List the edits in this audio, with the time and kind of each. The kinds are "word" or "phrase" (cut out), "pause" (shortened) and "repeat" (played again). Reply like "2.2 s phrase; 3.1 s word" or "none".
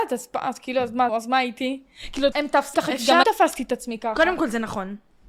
1.1 s phrase; 2.3 s word; 2.7 s word; 3.2 s word